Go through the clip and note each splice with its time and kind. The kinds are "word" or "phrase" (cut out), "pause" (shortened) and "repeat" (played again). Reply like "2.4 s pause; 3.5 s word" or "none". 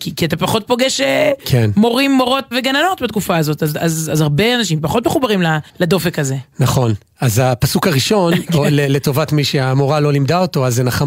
2.5 s word; 5.7 s pause